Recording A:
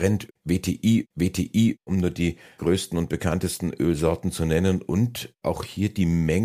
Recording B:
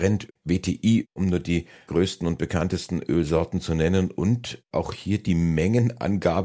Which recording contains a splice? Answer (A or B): A